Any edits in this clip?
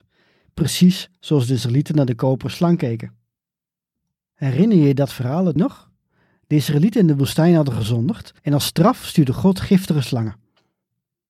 yes; 2 cuts; at 5.6 s, 8.4 s

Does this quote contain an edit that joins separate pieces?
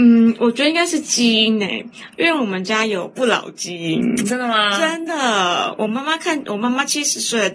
no; 0 cuts

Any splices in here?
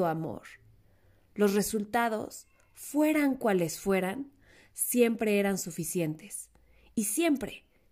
no; 0 cuts

